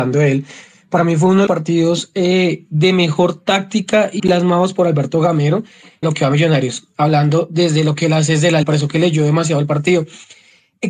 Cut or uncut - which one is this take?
cut